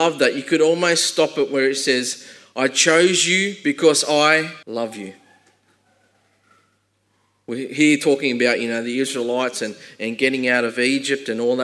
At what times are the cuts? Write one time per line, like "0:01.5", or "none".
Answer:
0:04.6